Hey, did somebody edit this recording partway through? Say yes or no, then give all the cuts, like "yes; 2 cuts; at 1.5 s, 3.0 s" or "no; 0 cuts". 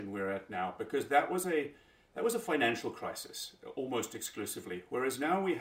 no; 0 cuts